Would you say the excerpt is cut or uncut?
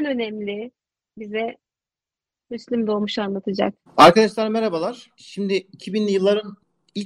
cut